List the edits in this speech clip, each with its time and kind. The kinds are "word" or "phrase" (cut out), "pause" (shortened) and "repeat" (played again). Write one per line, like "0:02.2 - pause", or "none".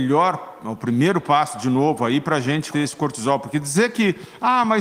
0:02.7 - word